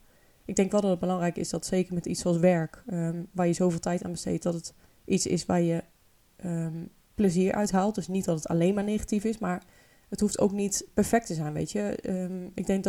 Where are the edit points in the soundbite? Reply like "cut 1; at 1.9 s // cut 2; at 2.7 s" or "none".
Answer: cut 1; at 4.9 s

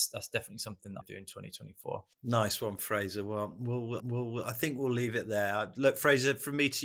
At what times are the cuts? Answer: cut 1; at 1.0 s // cut 2; at 2.1 s // cut 3; at 4.0 s

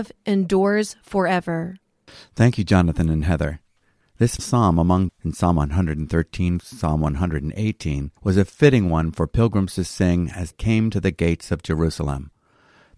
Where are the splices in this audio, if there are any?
cut 1; at 4.4 s // cut 2; at 5.1 s // cut 3; at 6.6 s // cut 4; at 8.2 s // cut 5; at 10.5 s

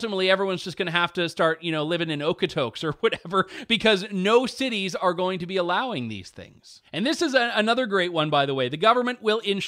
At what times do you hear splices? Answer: none

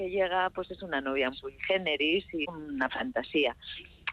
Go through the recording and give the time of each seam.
cut 1; at 1.3 s // cut 2; at 2.4 s // cut 3; at 2.9 s

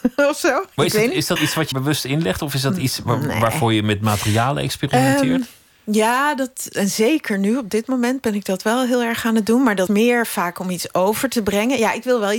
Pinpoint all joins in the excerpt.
cut 1; at 1.4 s // cut 2; at 1.7 s // cut 3; at 9.9 s

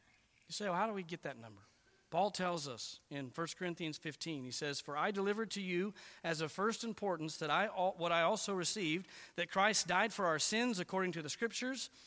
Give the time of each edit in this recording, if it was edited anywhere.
none

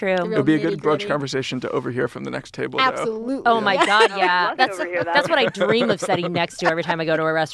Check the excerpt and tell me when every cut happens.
none

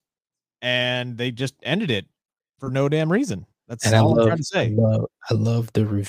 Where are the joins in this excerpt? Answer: none

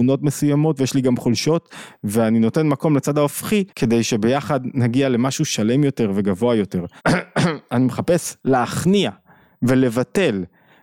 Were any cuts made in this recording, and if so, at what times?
cut 1; at 3.7 s // cut 2; at 7.0 s // cut 3; at 8.4 s

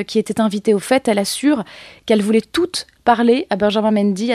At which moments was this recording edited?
none

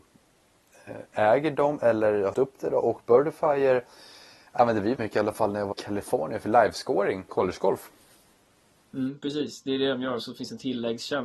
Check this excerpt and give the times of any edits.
cut 1; at 2.3 s // cut 2; at 5.0 s // cut 3; at 5.7 s // cut 4; at 7.3 s

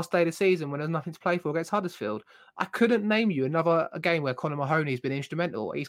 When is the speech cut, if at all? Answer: none

